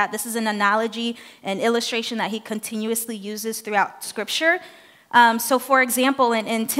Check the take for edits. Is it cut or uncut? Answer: uncut